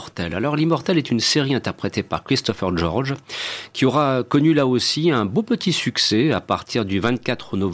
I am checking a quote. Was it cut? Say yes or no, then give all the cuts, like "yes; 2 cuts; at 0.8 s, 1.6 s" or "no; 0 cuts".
no; 0 cuts